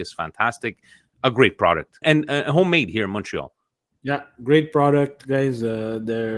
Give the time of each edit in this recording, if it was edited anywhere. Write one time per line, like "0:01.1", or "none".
0:02.0